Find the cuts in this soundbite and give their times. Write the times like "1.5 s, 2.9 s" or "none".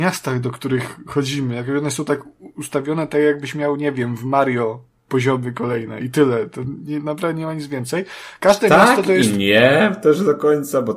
none